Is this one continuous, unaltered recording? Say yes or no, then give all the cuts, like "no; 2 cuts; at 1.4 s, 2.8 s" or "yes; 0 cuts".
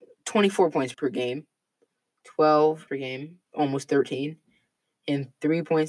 no; 3 cuts; at 0.9 s, 2.9 s, 3.4 s